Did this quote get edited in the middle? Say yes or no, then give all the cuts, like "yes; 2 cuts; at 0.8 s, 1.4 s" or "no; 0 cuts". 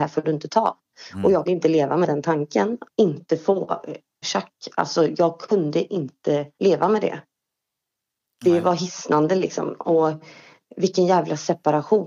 yes; 4 cuts; at 1.5 s, 2.9 s, 4.2 s, 6.5 s